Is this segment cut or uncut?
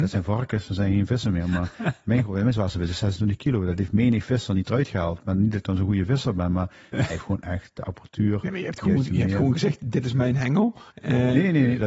cut